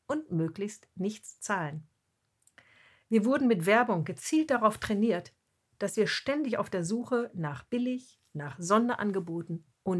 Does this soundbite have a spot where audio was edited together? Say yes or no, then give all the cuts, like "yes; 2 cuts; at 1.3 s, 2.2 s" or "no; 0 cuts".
no; 0 cuts